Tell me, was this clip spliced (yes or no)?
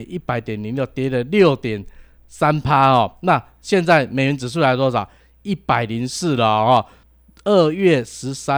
no